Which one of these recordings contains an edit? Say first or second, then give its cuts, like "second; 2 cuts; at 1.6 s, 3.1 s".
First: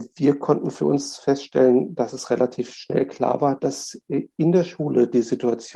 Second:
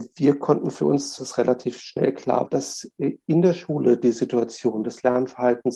second; 2 cuts; at 1.2 s, 2.5 s